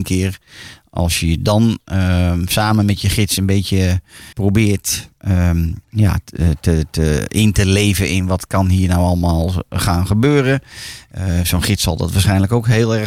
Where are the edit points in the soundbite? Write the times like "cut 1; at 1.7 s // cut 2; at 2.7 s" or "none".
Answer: cut 1; at 4.3 s // cut 2; at 5.8 s